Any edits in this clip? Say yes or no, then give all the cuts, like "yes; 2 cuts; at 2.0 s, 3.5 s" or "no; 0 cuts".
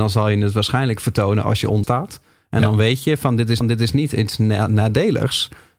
yes; 2 cuts; at 1.8 s, 3.6 s